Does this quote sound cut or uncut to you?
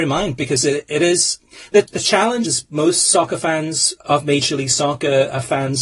cut